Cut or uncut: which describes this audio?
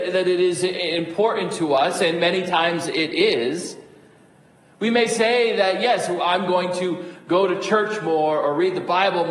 uncut